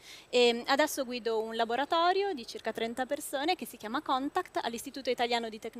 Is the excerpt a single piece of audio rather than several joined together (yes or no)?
yes